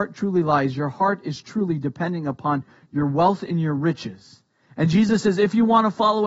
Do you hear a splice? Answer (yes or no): no